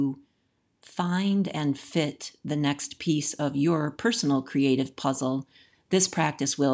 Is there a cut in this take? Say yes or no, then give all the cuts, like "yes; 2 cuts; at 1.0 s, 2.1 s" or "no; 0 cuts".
no; 0 cuts